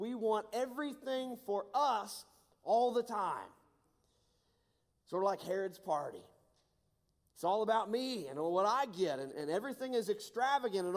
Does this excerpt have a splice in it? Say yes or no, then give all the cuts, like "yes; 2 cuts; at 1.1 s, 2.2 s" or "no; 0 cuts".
yes; 1 cut; at 9.3 s